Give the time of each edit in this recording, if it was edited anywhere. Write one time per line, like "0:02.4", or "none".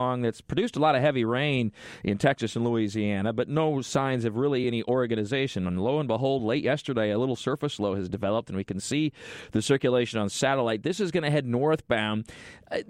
none

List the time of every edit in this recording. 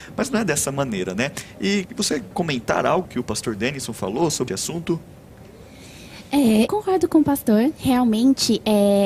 0:01.8
0:02.3
0:03.0
0:04.5
0:06.7

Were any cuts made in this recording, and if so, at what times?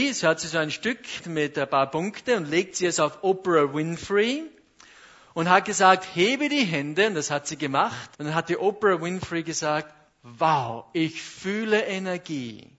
0:01.2
0:08.1

